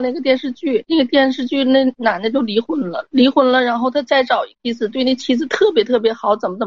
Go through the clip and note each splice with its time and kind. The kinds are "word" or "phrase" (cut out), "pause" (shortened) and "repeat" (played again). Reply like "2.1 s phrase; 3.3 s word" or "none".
4.5 s pause